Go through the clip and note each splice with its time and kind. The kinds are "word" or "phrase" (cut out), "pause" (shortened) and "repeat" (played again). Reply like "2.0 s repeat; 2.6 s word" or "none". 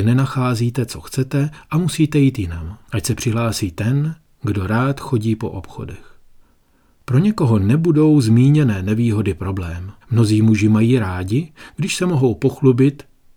2.8 s pause; 6.4 s pause; 10.0 s pause